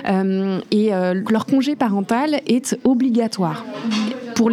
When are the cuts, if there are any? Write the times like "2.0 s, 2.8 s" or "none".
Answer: 1.2 s